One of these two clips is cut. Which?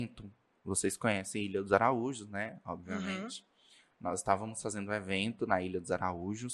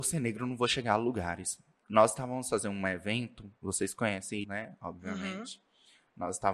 second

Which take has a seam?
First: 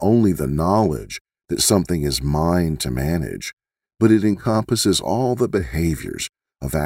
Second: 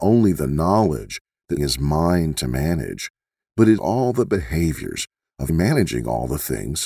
second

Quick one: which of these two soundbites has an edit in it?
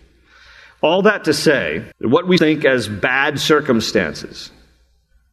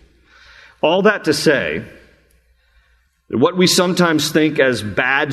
first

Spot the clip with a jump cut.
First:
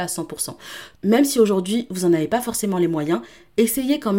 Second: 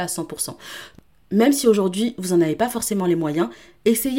first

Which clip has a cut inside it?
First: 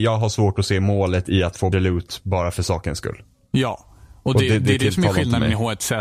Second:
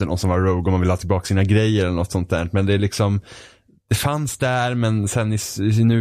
first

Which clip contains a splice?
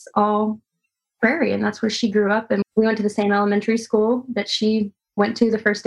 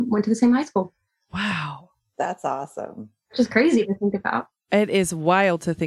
first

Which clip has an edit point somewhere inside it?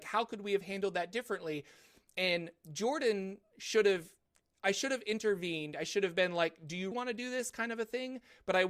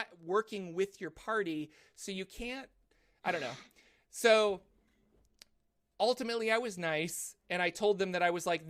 first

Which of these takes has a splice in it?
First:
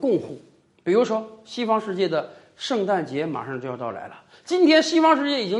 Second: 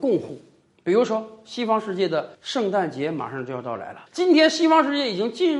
second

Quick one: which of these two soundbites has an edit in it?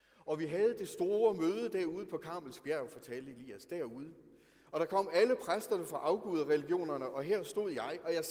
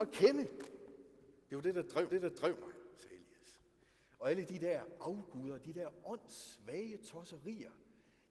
second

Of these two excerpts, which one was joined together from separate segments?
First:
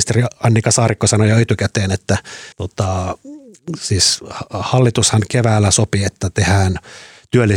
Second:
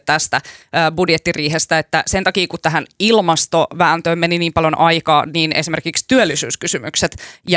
first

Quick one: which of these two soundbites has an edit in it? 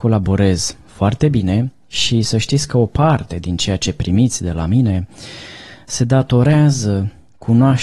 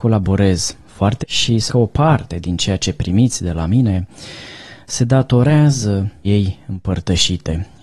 second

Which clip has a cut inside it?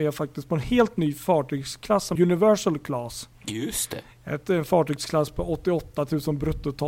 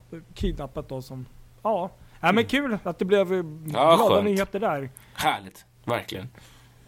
first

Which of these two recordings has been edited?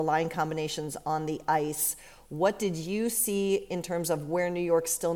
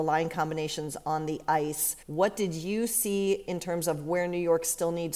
second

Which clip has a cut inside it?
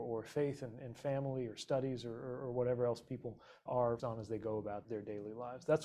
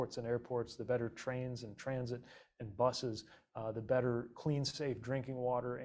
first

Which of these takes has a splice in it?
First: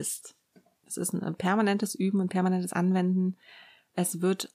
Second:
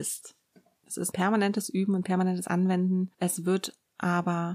second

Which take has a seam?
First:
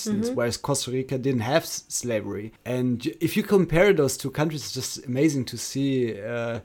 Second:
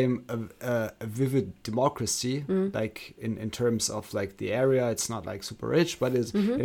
first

